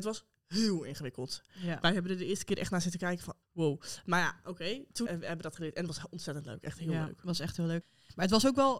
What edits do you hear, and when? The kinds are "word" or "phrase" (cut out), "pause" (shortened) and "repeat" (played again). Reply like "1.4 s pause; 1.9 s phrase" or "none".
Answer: 3.4 s pause; 5.1 s word